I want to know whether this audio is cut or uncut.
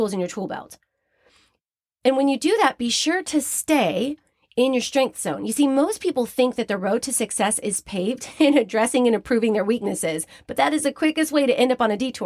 uncut